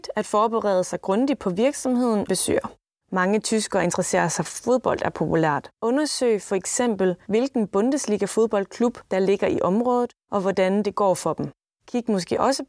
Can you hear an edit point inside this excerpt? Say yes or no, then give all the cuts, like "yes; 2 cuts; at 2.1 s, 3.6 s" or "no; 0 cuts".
yes; 3 cuts; at 2.3 s, 4.5 s, 5.7 s